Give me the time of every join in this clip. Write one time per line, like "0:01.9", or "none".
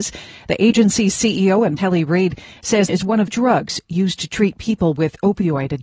0:01.8
0:02.9
0:03.3